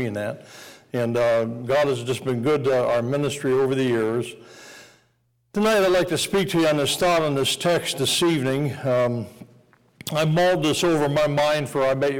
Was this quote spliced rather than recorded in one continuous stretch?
no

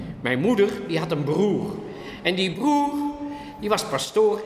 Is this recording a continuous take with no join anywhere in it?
yes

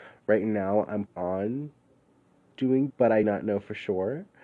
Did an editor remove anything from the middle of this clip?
yes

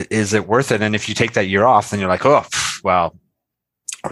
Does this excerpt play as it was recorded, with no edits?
yes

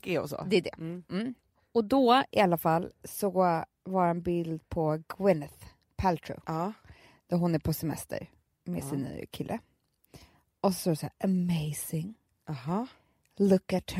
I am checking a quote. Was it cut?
no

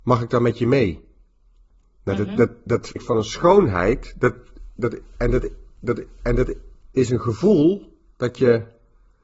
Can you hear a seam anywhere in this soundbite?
yes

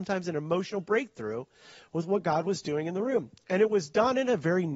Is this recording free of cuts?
yes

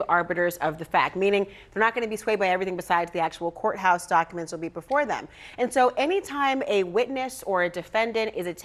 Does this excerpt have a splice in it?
no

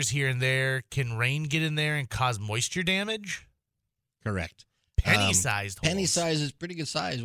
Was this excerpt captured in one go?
yes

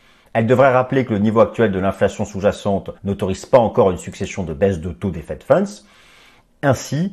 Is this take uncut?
no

